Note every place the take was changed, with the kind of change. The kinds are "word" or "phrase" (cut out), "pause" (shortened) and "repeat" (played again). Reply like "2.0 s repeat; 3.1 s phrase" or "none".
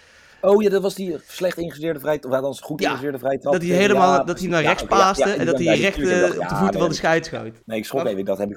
7.6 s pause